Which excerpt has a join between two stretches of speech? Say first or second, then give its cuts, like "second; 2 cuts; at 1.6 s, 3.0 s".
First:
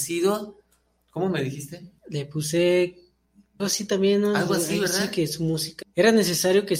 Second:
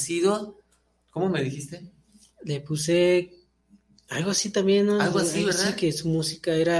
first; 3 cuts; at 2.0 s, 3.6 s, 5.8 s